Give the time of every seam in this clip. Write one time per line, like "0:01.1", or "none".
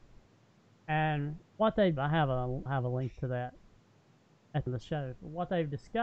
0:01.4
0:02.0
0:02.7
0:04.7